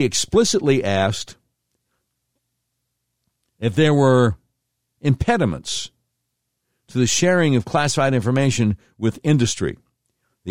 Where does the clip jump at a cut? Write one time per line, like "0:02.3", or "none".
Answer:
none